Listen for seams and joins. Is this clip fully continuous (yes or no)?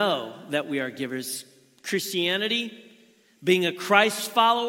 yes